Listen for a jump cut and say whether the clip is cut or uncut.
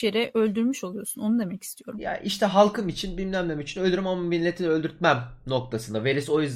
uncut